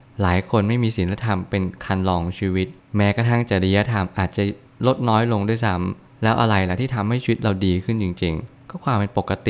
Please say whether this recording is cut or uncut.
uncut